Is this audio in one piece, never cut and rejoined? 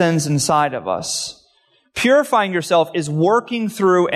yes; 0 cuts

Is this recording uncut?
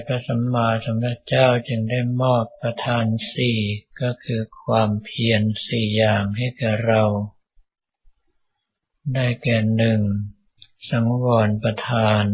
no; 1 cut; at 10.5 s

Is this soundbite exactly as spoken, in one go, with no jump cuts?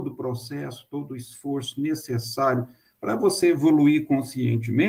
yes; 0 cuts

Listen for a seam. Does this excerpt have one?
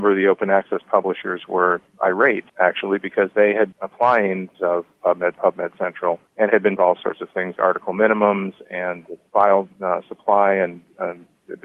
yes; 7 cuts; at 2.5 s, 3.7 s, 4.5 s, 5.4 s, 6.3 s, 6.8 s, 7.6 s

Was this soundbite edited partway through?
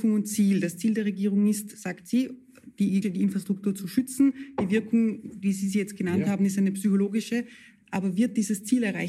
yes; 1 cut; at 3.0 s

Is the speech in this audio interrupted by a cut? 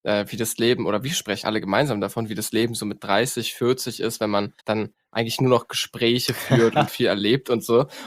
yes; 3 cuts; at 1.4 s, 4.6 s, 6.9 s

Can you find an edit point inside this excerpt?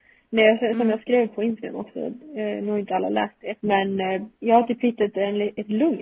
yes; 2 cuts; at 3.6 s, 4.4 s

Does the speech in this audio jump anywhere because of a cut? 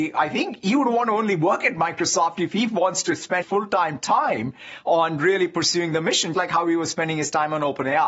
yes; 2 cuts; at 3.4 s, 6.3 s

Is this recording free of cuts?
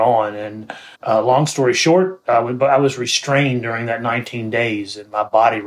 no; 1 cut; at 0.9 s

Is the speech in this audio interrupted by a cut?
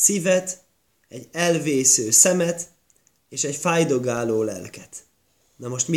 no; 0 cuts

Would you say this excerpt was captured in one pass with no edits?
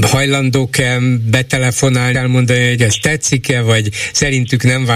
no; 2 cuts; at 2.1 s, 2.8 s

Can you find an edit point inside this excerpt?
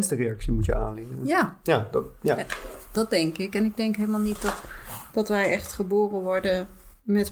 no; 0 cuts

